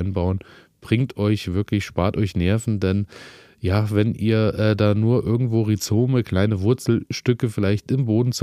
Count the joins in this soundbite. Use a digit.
0